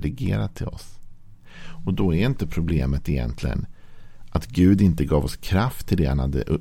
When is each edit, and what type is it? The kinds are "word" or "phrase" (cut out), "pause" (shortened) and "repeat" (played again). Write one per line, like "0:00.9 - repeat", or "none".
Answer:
none